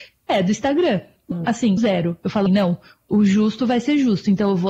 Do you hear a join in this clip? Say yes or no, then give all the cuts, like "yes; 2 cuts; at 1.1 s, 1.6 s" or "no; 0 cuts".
yes; 3 cuts; at 1.3 s, 1.8 s, 2.5 s